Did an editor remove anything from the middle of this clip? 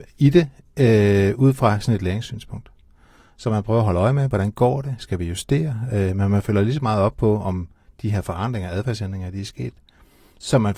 no; 0 cuts

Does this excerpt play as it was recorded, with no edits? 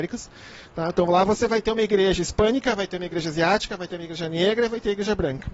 yes; 0 cuts

